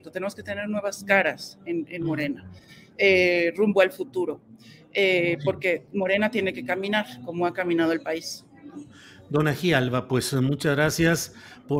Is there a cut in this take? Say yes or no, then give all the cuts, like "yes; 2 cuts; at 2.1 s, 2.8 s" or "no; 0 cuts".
no; 0 cuts